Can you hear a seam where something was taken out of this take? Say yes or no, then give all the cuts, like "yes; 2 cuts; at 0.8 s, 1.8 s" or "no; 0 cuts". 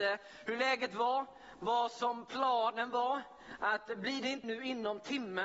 yes; 1 cut; at 4.4 s